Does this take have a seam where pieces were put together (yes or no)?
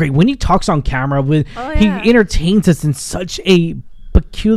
no